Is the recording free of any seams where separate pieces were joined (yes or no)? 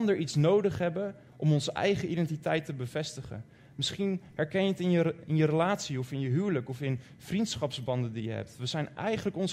yes